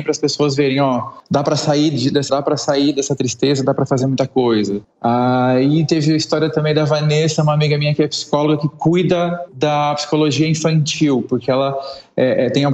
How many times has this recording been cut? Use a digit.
2